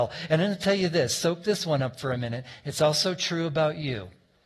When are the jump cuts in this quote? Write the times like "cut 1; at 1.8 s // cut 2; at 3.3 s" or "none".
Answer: none